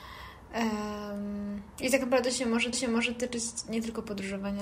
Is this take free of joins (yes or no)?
no